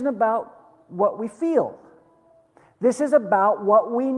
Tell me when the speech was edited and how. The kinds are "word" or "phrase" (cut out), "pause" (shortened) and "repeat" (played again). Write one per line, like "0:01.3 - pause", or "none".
none

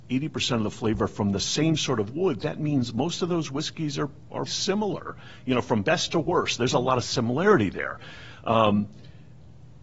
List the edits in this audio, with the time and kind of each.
0:04.5 - word

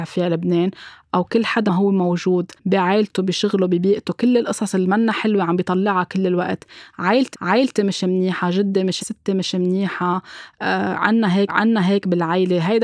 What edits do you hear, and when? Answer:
0:01.7 - word
0:02.6 - pause
0:07.3 - repeat
0:09.0 - word
0:11.5 - repeat

